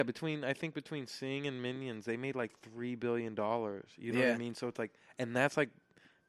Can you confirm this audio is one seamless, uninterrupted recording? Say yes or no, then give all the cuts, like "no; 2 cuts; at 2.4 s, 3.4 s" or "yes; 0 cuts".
yes; 0 cuts